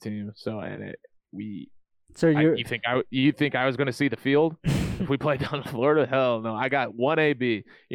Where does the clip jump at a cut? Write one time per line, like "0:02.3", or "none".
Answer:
none